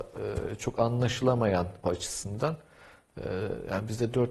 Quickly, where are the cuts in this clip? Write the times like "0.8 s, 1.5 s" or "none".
1.8 s